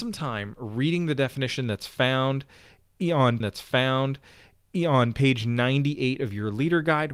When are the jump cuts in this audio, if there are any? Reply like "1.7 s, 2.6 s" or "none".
3.4 s